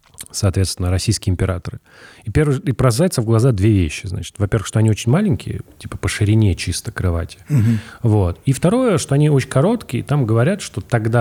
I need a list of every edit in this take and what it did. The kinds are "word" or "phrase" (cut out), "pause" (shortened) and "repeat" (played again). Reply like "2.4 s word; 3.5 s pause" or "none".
none